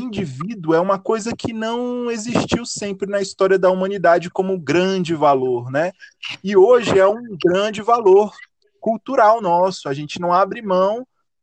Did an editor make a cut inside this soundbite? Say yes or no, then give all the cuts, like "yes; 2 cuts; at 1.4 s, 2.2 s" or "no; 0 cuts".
no; 0 cuts